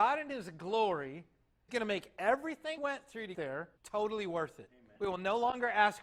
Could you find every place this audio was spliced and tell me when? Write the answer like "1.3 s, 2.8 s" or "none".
1.7 s, 2.8 s, 3.3 s, 3.8 s, 5.0 s